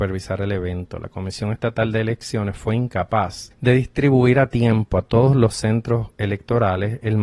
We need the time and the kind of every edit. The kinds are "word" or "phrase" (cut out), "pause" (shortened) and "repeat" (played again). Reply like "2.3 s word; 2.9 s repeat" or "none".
none